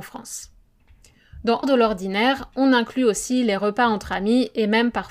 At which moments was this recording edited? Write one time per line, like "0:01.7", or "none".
0:01.6